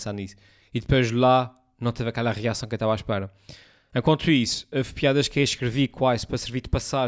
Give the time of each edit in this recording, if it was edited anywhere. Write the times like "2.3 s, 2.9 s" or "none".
none